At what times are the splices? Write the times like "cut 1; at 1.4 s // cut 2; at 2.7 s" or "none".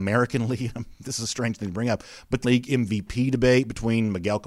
cut 1; at 2.4 s